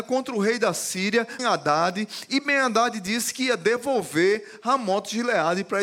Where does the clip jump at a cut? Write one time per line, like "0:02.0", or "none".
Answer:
0:01.4